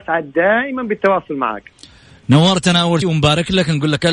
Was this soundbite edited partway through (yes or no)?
yes